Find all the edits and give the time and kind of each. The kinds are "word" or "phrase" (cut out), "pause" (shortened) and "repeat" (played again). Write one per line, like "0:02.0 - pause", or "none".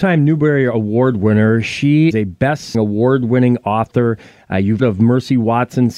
0:02.1 - word
0:02.7 - word
0:04.8 - word